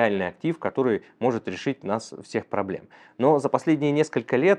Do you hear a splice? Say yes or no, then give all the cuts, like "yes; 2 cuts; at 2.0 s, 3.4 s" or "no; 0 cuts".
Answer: no; 0 cuts